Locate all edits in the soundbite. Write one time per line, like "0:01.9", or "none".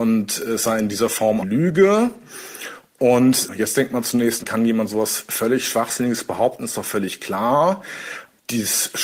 0:01.4
0:04.4